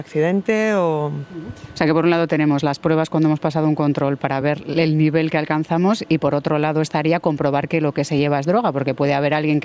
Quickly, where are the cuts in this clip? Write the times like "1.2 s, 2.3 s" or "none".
none